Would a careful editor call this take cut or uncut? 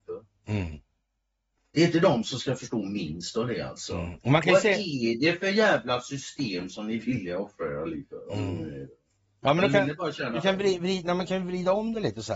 uncut